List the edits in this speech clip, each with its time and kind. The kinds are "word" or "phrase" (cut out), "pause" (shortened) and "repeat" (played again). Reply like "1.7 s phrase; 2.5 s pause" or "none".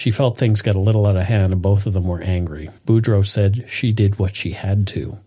2.8 s pause

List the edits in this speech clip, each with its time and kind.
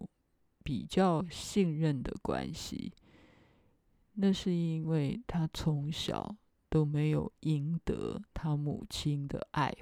none

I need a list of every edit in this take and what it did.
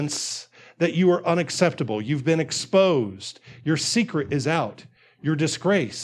none

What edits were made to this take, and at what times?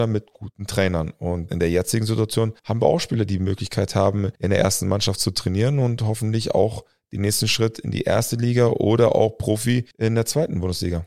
1.5 s word; 2.6 s pause; 4.4 s pause; 9.9 s pause

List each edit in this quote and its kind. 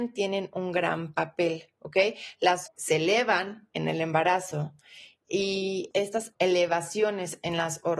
2.7 s word

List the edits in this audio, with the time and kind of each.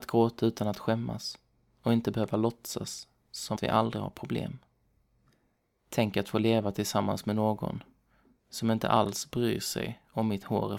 3.6 s word

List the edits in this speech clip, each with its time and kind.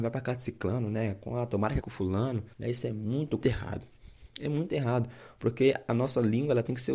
1.8 s phrase; 2.5 s pause; 3.4 s phrase; 4.3 s pause

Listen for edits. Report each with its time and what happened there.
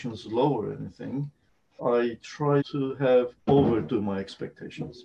1.8 s word; 2.6 s word; 3.4 s pause

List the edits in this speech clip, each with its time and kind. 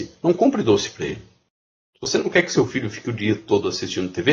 none

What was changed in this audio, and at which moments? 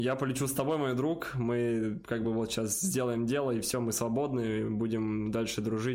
none

